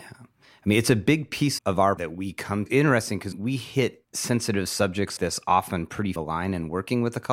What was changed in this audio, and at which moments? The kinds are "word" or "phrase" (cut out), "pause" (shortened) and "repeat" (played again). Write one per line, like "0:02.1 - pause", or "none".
0:01.6 - word
0:02.0 - word
0:02.7 - phrase
0:03.3 - word
0:04.0 - pause
0:05.2 - word
0:06.2 - phrase